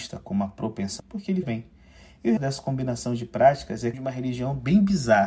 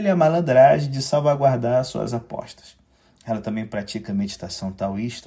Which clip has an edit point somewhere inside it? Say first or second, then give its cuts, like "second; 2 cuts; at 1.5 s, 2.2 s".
first; 4 cuts; at 1.0 s, 1.4 s, 2.4 s, 3.9 s